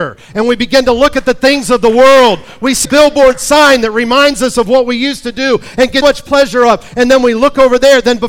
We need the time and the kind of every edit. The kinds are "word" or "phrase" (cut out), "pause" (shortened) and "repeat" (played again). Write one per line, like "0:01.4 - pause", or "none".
0:02.8 - word
0:06.0 - word